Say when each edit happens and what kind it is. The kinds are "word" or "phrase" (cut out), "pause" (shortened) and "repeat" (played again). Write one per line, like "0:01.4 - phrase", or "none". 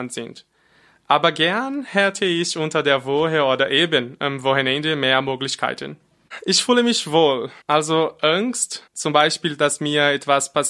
0:07.6 - pause
0:08.9 - pause